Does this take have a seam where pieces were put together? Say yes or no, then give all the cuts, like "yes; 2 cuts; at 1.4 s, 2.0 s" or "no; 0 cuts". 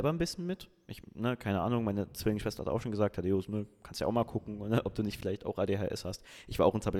no; 0 cuts